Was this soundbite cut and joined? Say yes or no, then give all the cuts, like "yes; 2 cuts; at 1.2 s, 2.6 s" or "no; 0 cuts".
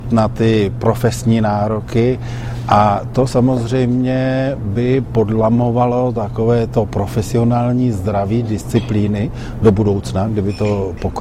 no; 0 cuts